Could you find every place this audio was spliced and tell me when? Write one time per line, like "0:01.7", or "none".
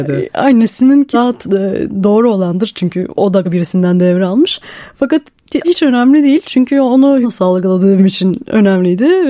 0:01.1
0:03.1
0:03.4
0:05.6
0:07.2
0:08.0